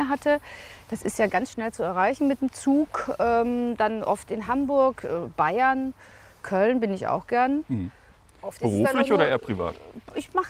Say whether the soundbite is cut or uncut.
uncut